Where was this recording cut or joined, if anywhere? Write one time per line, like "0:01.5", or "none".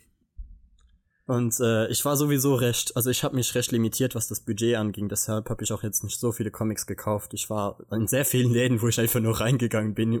none